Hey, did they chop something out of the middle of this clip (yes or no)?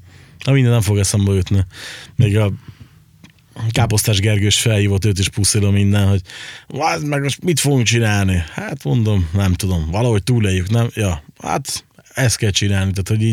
no